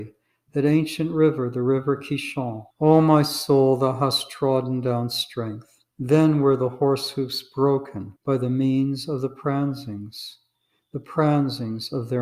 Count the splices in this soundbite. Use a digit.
3